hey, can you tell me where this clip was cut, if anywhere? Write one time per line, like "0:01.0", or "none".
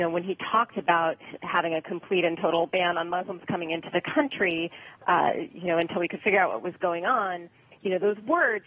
none